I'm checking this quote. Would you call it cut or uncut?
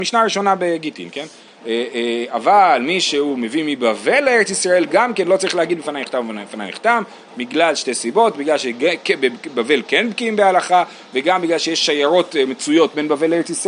uncut